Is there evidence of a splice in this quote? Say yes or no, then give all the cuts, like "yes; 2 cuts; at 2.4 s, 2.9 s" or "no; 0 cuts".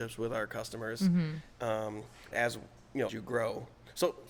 yes; 2 cuts; at 2.3 s, 3.1 s